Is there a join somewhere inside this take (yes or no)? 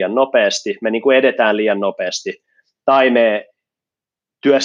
no